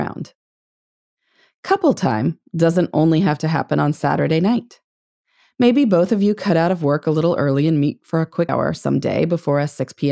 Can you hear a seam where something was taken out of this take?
yes; 1 cut; at 8.5 s

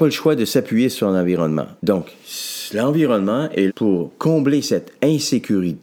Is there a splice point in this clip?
yes; 2 cuts; at 1.8 s, 3.7 s

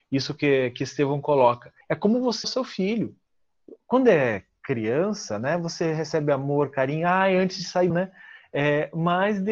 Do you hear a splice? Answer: yes; 3 cuts; at 1.8 s, 2.4 s, 7.9 s

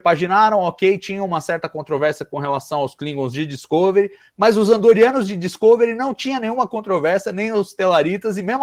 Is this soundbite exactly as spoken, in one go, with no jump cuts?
yes; 0 cuts

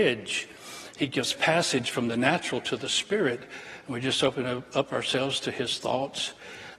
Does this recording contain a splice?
no; 0 cuts

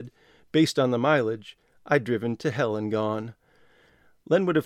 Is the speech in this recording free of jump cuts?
yes; 0 cuts

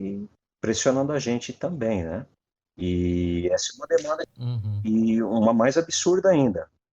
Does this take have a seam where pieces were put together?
yes; 1 cut; at 2.4 s

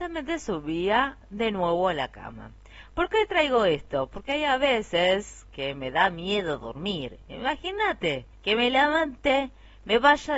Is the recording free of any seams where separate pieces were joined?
no; 2 cuts; at 1.2 s, 8.3 s

